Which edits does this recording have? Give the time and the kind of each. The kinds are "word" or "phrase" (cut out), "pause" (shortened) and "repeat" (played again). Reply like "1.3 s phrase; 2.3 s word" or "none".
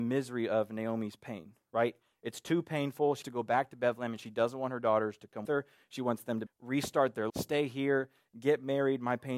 3.2 s word; 5.4 s word; 6.5 s word; 7.3 s word